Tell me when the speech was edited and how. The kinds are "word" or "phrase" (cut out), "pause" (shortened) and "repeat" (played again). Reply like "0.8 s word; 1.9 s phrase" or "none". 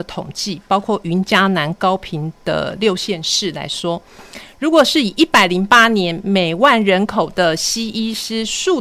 none